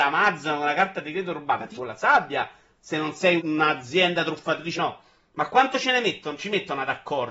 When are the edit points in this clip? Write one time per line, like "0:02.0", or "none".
0:01.8
0:03.4
0:04.8